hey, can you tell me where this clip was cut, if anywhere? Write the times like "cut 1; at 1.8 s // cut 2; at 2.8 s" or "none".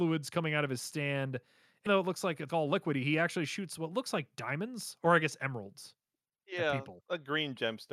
cut 1; at 1.9 s // cut 2; at 2.5 s // cut 3; at 7.0 s